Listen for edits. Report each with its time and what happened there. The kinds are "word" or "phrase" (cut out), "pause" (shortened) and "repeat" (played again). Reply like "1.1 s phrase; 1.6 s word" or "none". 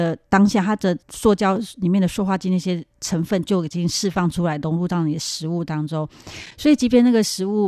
1.0 s pause